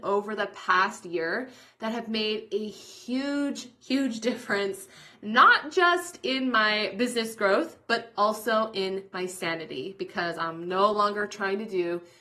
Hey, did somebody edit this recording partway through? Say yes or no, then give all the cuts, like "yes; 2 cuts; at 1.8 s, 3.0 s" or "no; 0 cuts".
no; 0 cuts